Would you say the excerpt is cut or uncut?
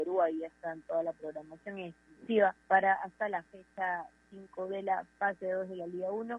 cut